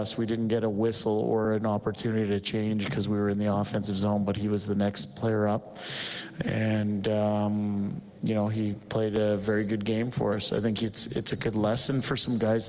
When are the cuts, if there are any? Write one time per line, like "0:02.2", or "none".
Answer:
none